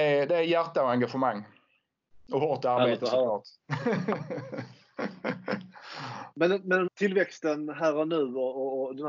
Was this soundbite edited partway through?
yes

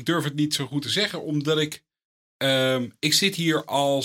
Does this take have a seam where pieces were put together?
no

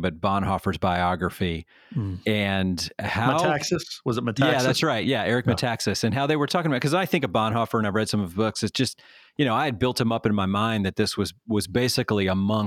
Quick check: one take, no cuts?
yes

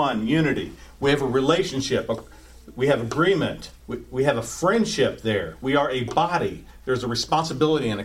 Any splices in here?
yes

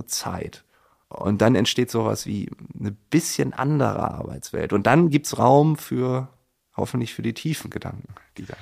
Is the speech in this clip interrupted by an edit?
no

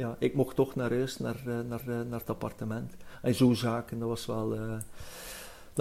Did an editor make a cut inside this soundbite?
yes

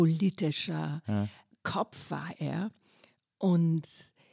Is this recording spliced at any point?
no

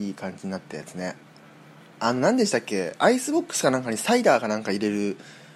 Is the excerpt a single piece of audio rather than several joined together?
yes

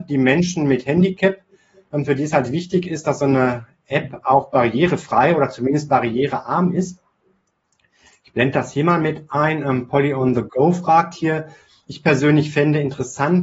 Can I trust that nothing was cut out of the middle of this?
yes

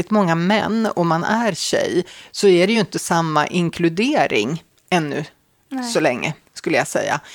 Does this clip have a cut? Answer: no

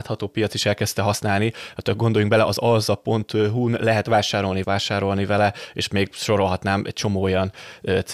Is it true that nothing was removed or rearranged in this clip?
no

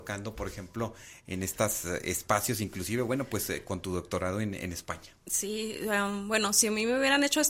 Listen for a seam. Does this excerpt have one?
no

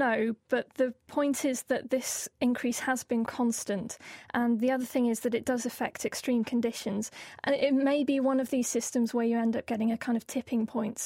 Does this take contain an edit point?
yes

